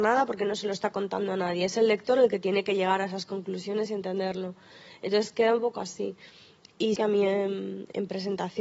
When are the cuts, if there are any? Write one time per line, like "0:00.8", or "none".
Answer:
0:07.0

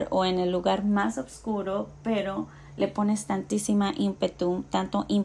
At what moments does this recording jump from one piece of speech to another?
none

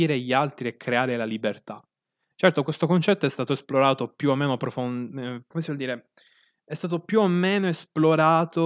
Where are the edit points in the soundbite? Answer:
0:05.5

